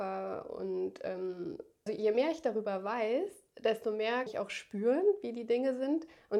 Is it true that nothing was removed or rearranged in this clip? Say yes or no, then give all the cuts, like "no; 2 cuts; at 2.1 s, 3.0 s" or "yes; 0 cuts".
no; 2 cuts; at 1.9 s, 4.3 s